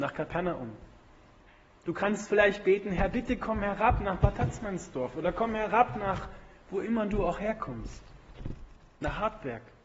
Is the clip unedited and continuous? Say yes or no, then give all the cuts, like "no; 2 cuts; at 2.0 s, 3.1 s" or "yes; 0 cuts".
yes; 0 cuts